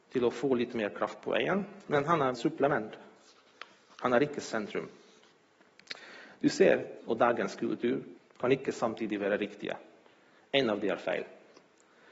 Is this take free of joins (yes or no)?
no